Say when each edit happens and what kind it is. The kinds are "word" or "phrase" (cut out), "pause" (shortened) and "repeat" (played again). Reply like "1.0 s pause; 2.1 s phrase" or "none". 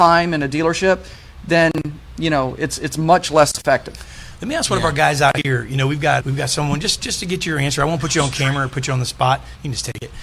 6.2 s word